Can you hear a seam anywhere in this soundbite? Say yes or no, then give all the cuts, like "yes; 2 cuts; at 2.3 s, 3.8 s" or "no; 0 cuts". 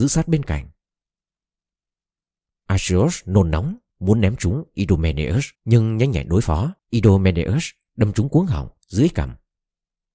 yes; 2 cuts; at 5.5 s, 6.8 s